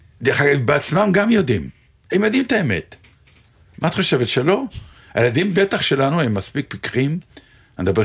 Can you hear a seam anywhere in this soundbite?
no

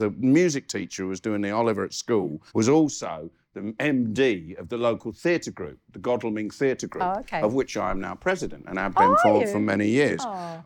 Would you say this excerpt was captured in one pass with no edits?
no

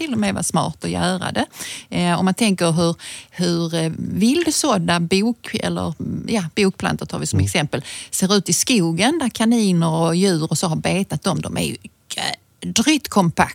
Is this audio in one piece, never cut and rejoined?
yes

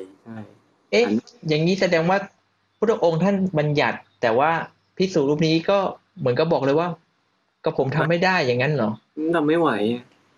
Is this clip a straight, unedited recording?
yes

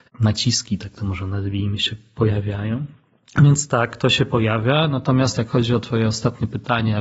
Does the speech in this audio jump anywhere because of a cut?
no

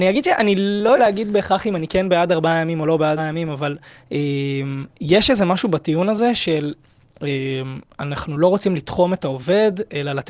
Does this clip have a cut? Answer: yes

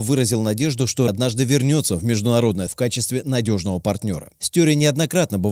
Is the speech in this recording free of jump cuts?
no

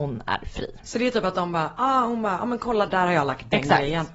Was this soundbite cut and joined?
yes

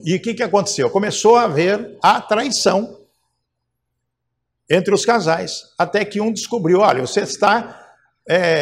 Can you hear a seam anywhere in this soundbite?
no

